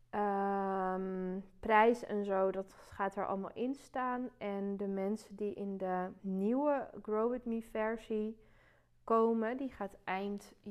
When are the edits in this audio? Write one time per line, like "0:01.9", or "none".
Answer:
0:02.7
0:06.2